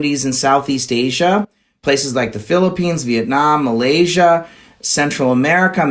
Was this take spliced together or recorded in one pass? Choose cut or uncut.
uncut